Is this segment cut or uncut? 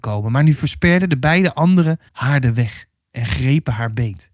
cut